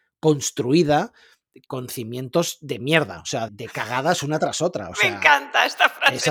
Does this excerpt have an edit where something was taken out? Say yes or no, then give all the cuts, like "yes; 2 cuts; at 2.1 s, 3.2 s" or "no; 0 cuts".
yes; 1 cut; at 3.5 s